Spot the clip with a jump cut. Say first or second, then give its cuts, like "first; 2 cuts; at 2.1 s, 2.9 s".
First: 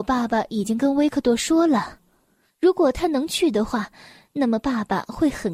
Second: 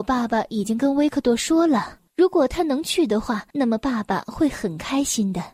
second; 2 cuts; at 2.1 s, 3.5 s